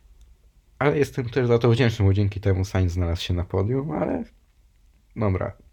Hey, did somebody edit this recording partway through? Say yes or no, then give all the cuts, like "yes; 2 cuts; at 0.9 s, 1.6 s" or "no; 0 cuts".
no; 0 cuts